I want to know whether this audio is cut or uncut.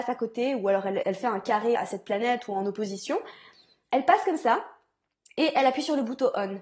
cut